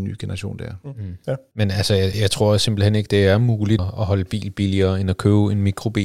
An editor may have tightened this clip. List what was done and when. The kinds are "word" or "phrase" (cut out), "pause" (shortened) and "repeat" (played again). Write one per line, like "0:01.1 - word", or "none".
0:02.1 - word
0:03.8 - word